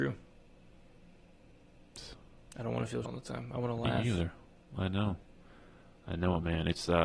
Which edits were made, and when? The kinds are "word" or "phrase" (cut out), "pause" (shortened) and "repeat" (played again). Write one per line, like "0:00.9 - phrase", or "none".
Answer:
0:03.0 - word